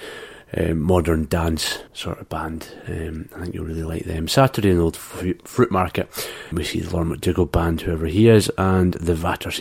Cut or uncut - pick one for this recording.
cut